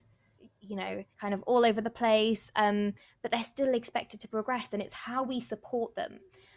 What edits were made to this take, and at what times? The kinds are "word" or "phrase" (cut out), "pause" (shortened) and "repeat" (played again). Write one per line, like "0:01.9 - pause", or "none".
0:01.1 - pause